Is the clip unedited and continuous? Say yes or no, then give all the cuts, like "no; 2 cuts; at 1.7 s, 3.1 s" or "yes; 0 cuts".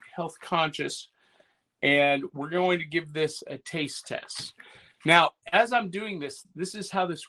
yes; 0 cuts